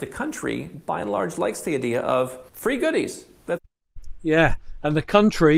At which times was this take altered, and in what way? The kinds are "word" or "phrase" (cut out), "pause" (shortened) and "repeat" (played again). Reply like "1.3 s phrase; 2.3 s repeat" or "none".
2.5 s pause